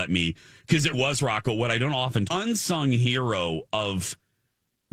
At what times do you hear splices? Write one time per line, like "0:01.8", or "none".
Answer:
0:00.9
0:02.3